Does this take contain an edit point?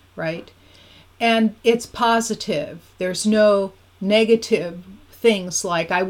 yes; 3 cuts; at 1.6 s, 2.9 s, 3.8 s

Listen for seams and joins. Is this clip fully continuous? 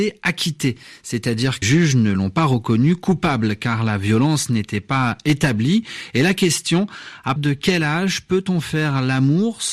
no; 2 cuts; at 1.6 s, 7.4 s

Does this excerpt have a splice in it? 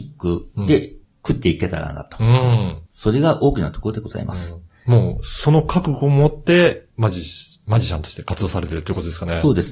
yes; 2 cuts; at 1.1 s, 2.9 s

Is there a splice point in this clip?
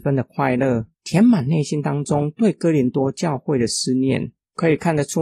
yes; 1 cut; at 0.9 s

